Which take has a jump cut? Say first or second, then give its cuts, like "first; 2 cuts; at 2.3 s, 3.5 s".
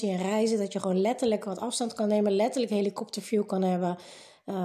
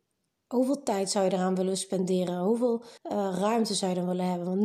second; 1 cut; at 3.0 s